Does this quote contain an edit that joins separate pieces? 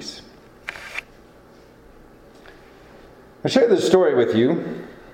no; 0 cuts

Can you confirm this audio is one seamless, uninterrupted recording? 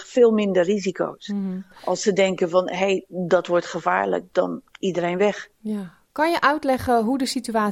yes; 0 cuts

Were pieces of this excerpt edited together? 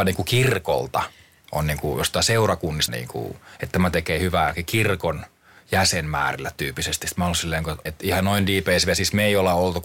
yes; 2 cuts; at 2.9 s, 7.9 s

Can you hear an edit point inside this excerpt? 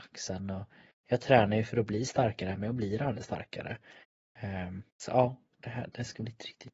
yes; 1 cut; at 4.9 s

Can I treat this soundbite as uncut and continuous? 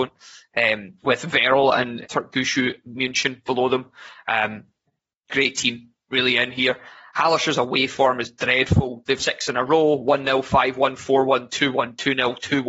no; 5 cuts; at 1.0 s, 2.0 s, 3.5 s, 5.3 s, 9.2 s

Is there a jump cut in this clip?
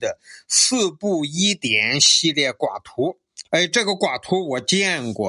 yes; 1 cut; at 3.5 s

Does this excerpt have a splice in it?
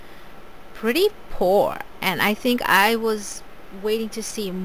no; 0 cuts

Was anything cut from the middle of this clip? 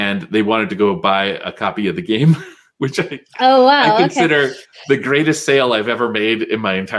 no; 0 cuts

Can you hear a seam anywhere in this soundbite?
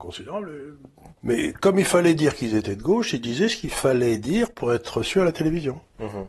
yes; 1 cut; at 1.2 s

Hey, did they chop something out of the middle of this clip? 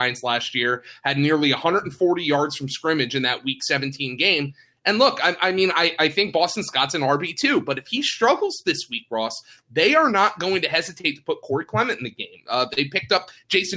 no; 0 cuts

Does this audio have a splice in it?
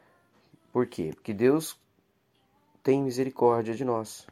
no; 0 cuts

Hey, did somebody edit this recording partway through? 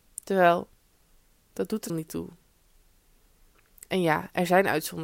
yes; 1 cut; at 1.9 s

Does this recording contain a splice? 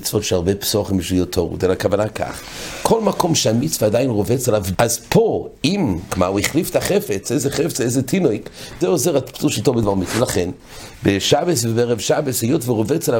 yes; 3 cuts; at 4.7 s, 6.1 s, 8.8 s

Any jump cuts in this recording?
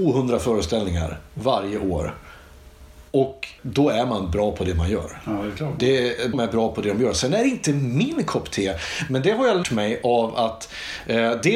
yes; 3 cuts; at 3.6 s, 6.3 s, 9.6 s

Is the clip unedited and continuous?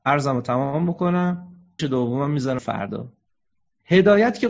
no; 2 cuts; at 1.8 s, 2.6 s

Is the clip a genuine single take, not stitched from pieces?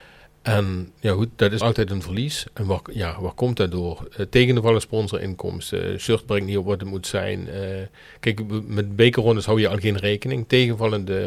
no; 1 cut; at 1.6 s

